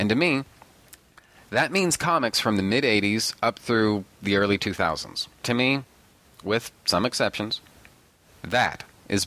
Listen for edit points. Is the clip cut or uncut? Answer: cut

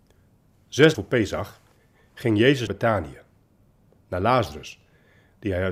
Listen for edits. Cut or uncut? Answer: cut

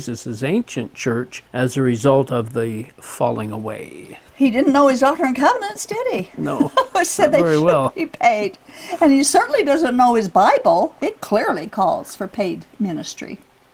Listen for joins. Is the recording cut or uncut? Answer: cut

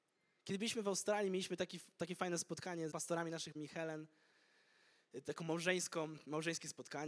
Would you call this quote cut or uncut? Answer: cut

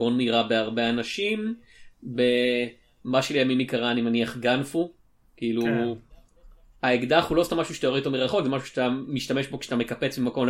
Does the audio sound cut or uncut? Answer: uncut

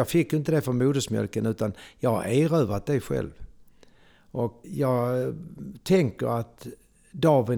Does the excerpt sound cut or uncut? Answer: cut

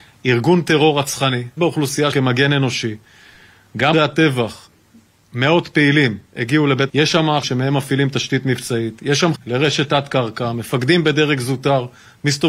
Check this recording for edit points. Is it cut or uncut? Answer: cut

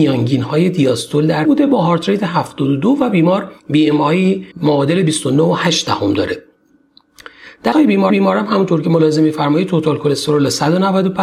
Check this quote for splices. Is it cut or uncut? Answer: cut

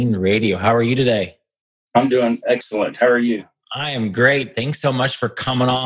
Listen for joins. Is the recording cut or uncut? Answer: uncut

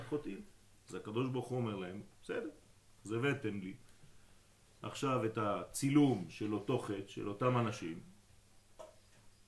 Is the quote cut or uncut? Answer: uncut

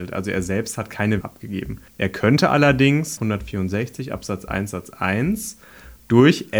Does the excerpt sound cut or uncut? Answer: cut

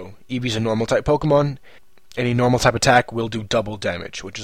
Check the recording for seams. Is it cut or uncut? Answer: uncut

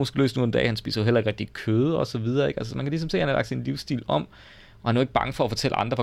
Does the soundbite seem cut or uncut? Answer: uncut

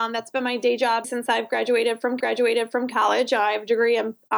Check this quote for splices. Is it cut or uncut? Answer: cut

